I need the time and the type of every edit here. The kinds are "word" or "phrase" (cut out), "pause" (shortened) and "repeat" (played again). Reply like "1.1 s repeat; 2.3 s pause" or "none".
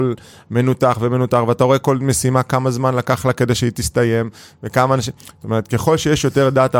none